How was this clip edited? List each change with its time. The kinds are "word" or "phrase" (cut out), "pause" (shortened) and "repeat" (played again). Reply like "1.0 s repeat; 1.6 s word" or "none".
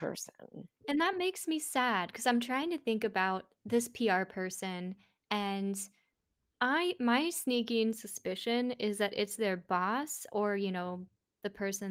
none